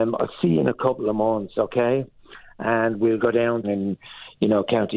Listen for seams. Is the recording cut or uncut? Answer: cut